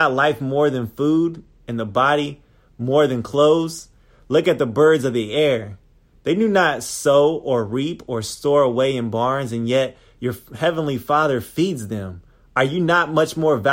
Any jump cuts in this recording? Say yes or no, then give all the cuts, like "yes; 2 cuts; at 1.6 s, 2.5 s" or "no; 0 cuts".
no; 0 cuts